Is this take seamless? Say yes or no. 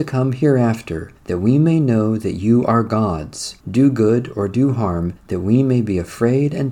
no